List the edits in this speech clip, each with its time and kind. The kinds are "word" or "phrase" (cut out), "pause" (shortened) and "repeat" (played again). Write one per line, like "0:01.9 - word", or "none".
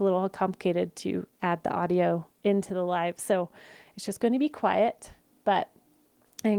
0:02.3 - pause